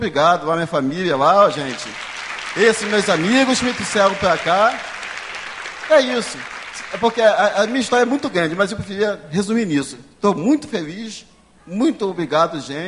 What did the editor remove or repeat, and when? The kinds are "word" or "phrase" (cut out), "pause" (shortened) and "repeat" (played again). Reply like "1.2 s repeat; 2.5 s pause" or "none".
none